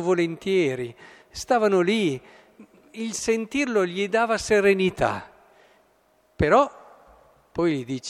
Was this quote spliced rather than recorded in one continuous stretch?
no; 0 cuts

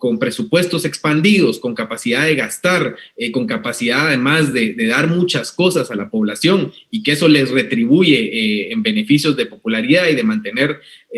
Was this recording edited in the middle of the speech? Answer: no; 0 cuts

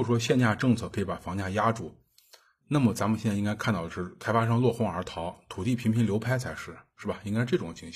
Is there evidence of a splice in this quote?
no; 0 cuts

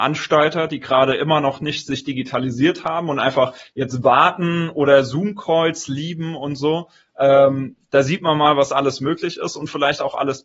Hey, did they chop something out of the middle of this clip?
no; 0 cuts

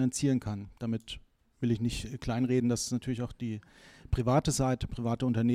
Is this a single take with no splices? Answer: yes; 0 cuts

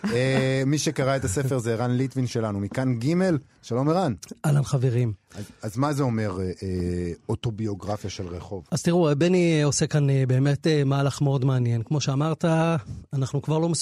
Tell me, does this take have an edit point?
no; 0 cuts

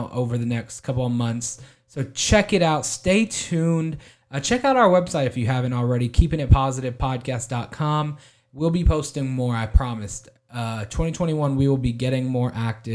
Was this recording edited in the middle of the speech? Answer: no; 0 cuts

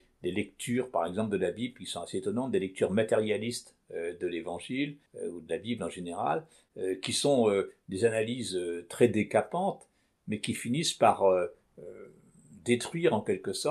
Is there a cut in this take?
yes; 1 cut; at 5.1 s

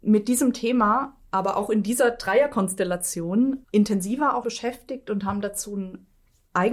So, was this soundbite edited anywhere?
yes; 2 cuts; at 3.6 s, 4.4 s

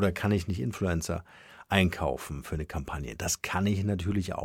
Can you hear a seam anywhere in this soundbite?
no; 0 cuts

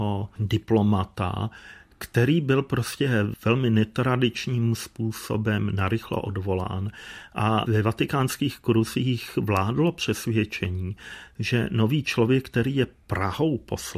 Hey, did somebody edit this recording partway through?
no; 0 cuts

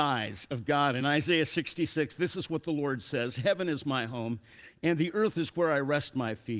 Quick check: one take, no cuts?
yes; 0 cuts

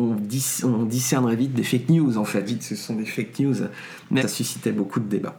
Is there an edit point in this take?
yes; 2 cuts; at 2.4 s, 4.2 s

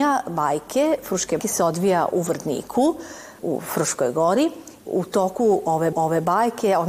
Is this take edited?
yes; 4 cuts; at 1.4 s, 3.4 s, 4.9 s, 5.9 s

